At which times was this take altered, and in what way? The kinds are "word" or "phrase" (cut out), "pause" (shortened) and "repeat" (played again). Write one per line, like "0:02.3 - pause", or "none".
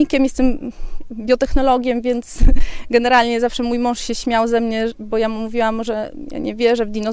none